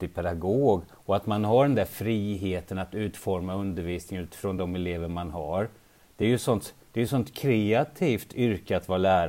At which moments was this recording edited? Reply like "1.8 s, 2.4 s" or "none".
none